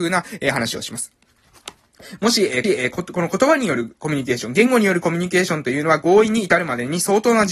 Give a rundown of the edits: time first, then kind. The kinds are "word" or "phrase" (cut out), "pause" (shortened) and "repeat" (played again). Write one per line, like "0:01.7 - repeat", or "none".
0:02.6 - repeat